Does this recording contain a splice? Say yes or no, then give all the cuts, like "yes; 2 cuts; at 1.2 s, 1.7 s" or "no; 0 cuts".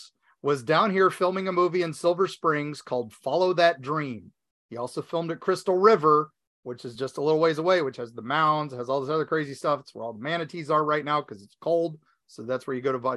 no; 0 cuts